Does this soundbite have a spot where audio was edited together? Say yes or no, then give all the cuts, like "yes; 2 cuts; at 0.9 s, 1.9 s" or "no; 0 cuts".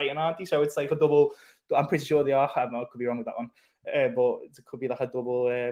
no; 0 cuts